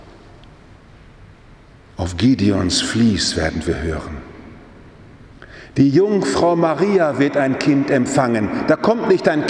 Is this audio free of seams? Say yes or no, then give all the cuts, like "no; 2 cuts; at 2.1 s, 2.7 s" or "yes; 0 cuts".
yes; 0 cuts